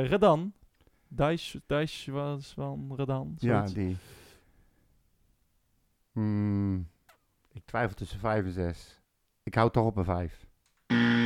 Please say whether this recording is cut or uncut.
cut